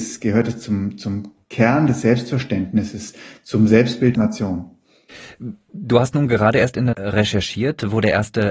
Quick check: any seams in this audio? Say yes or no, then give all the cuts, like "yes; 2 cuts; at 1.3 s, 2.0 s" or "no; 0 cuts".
yes; 2 cuts; at 4.1 s, 6.9 s